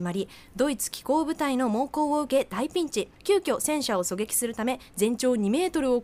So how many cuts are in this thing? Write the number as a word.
one